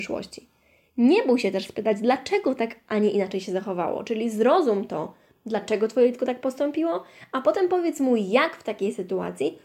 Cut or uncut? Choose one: uncut